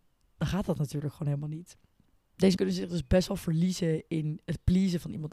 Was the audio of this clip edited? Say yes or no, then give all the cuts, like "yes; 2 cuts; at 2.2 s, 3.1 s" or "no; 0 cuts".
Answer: yes; 1 cut; at 2.6 s